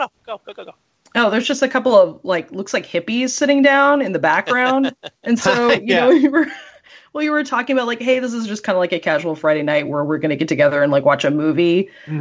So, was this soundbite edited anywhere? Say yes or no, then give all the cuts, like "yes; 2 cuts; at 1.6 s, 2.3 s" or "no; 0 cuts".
no; 0 cuts